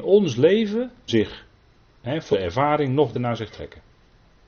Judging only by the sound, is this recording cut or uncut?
cut